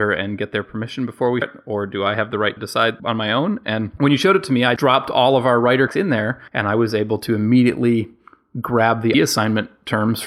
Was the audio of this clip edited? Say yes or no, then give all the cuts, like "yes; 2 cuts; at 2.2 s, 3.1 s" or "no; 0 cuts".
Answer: yes; 7 cuts; at 1.4 s, 2.6 s, 3.0 s, 4.8 s, 5.9 s, 6.5 s, 9.1 s